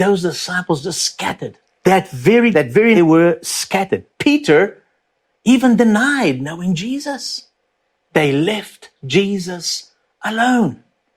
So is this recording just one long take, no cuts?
no; 4 cuts; at 1.6 s, 2.5 s, 2.9 s, 9.0 s

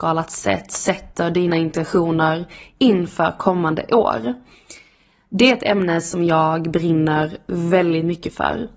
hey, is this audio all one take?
yes; 0 cuts

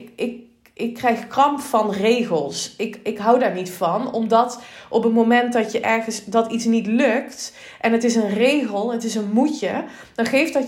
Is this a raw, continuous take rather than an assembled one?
yes; 0 cuts

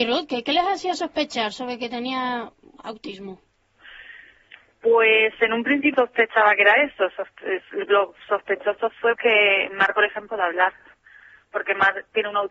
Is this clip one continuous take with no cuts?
no; 3 cuts; at 5.9 s, 9.2 s, 10.3 s

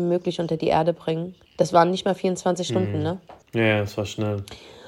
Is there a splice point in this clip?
yes; 2 cuts; at 1.5 s, 3.4 s

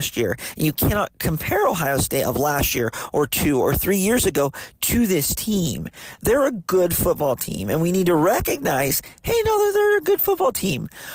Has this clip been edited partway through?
no; 0 cuts

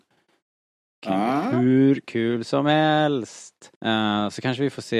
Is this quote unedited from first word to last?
no; 1 cut; at 3.8 s

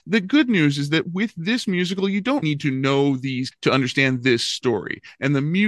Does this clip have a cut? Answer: yes; 2 cuts; at 2.4 s, 3.5 s

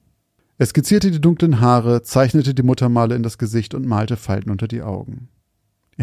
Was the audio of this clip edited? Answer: no; 0 cuts

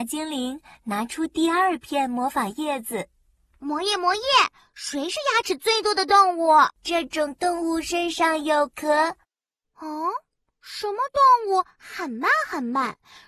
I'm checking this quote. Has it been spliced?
yes; 1 cut; at 6.7 s

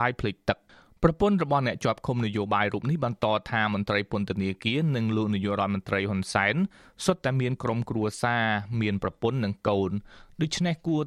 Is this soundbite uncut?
yes; 0 cuts

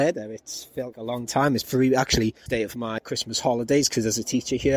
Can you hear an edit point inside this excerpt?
yes; 4 cuts; at 0.9 s, 1.6 s, 2.5 s, 3.0 s

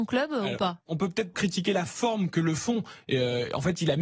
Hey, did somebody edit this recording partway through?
yes; 1 cut; at 1.3 s

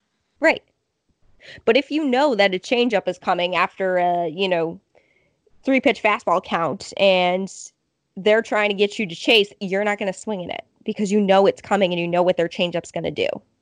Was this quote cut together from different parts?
no; 0 cuts

